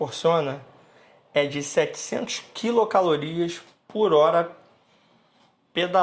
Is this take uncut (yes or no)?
yes